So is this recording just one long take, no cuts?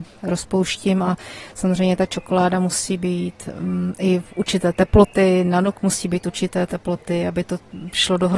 yes; 0 cuts

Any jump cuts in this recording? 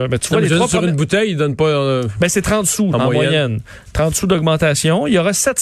yes; 1 cut; at 2.9 s

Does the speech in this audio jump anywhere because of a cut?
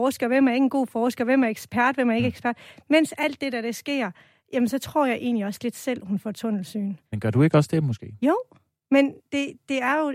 yes; 1 cut; at 7.0 s

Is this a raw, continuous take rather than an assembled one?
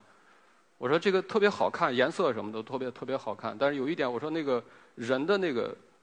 yes; 0 cuts

